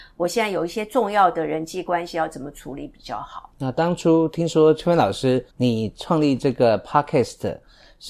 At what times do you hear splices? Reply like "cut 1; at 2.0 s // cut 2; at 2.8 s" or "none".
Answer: cut 1; at 3.5 s // cut 2; at 5.5 s